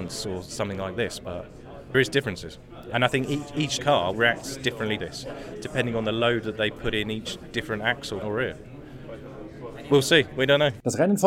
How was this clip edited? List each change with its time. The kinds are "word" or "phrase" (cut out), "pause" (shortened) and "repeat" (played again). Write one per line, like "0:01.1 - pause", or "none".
0:01.9 - word
0:03.8 - word
0:04.1 - word
0:05.0 - word
0:08.2 - word